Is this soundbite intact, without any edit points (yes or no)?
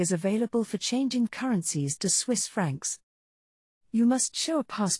no